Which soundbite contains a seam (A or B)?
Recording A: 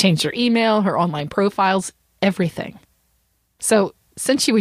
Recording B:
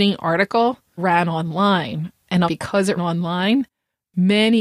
B